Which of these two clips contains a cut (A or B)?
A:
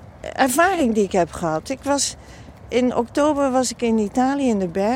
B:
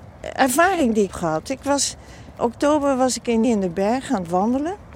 B